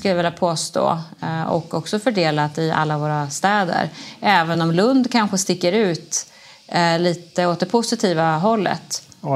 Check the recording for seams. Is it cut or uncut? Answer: uncut